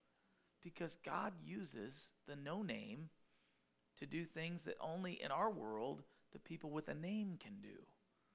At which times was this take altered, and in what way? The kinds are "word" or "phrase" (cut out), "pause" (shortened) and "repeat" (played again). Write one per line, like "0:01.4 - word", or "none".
none